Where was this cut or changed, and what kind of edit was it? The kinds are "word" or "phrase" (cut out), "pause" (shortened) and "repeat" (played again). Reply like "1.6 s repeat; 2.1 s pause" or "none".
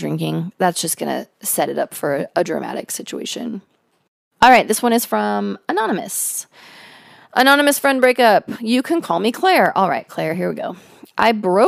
none